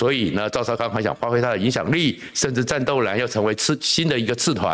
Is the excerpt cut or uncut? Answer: uncut